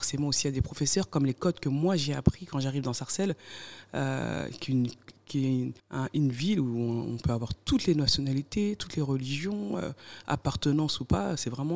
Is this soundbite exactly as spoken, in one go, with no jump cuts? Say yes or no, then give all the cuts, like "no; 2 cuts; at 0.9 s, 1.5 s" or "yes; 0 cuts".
no; 1 cut; at 5.8 s